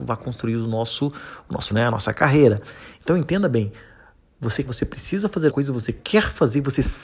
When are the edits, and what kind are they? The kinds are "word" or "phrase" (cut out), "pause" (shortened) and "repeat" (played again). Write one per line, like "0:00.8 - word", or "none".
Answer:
0:01.7 - word
0:04.7 - word
0:05.5 - word